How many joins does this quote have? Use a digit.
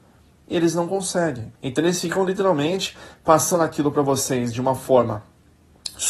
1